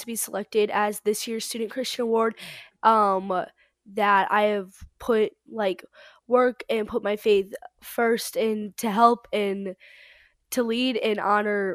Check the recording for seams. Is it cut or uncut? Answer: uncut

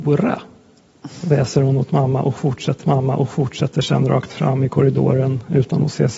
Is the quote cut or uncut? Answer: cut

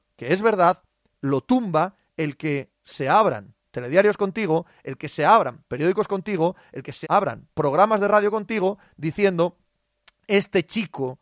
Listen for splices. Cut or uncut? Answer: cut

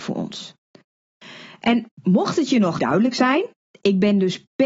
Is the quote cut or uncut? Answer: cut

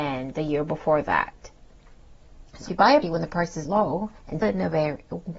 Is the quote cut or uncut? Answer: cut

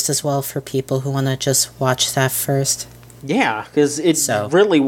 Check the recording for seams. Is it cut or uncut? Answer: uncut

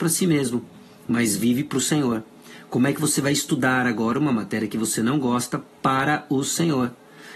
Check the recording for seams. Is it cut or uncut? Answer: uncut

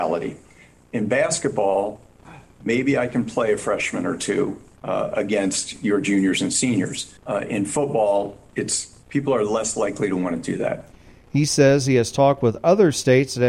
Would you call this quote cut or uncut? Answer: uncut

